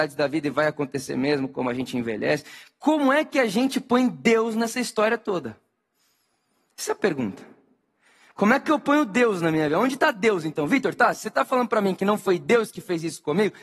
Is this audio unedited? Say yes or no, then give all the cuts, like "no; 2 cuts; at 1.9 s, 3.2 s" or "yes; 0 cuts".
yes; 0 cuts